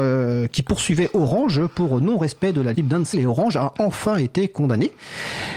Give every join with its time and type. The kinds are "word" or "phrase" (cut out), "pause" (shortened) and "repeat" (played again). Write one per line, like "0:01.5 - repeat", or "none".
0:02.7 - word
0:03.1 - word